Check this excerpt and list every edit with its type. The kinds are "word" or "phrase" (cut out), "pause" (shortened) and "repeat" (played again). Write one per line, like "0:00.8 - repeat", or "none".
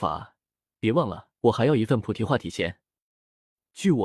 0:01.4 - pause